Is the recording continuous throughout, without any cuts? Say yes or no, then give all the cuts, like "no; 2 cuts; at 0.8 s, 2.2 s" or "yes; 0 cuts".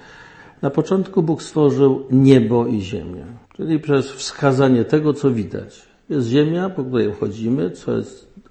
no; 1 cut; at 3.4 s